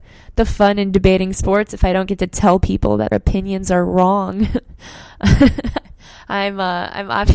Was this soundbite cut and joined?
yes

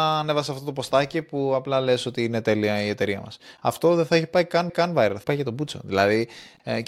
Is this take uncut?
no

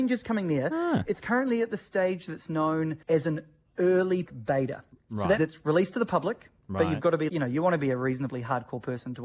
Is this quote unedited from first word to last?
no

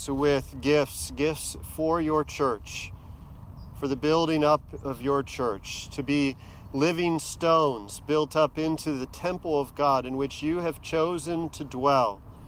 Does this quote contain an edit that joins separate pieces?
no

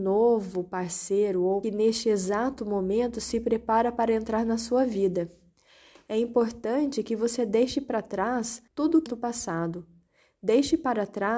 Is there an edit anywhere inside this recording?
yes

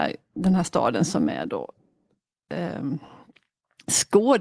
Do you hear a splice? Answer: no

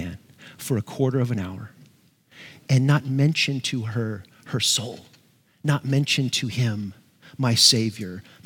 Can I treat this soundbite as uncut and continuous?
yes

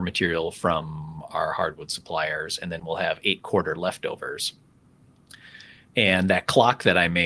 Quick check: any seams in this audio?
no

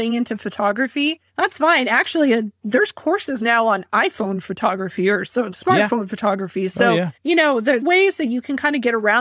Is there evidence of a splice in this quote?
yes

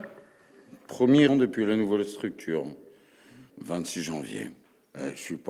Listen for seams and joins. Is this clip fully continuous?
no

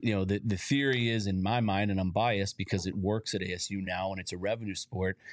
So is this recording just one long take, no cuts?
yes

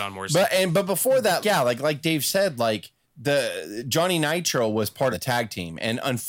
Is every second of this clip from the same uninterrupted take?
no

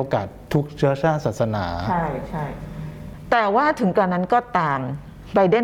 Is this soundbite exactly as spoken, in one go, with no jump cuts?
yes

